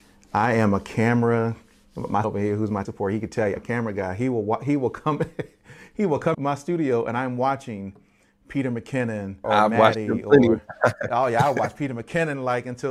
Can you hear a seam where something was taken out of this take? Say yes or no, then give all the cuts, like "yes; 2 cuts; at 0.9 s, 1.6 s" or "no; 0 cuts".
yes; 5 cuts; at 2.2 s, 2.8 s, 3.6 s, 6.3 s, 9.4 s